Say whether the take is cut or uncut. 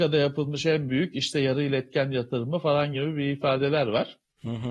uncut